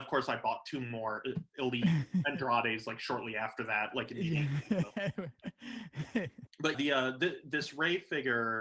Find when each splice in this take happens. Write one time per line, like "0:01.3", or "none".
0:06.7